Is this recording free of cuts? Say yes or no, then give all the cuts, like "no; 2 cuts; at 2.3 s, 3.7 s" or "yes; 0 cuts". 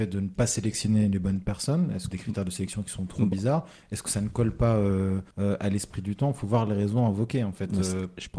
no; 2 cuts; at 2.1 s, 5.3 s